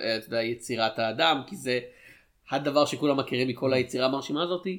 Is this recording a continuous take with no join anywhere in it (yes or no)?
yes